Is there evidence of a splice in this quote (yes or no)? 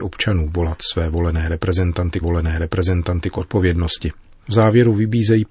yes